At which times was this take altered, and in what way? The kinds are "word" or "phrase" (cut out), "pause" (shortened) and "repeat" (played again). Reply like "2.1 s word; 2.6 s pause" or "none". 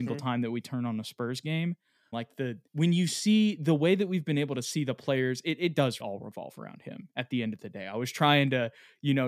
2.1 s phrase; 2.7 s pause; 6.0 s word